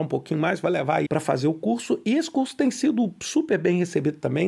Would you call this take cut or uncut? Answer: cut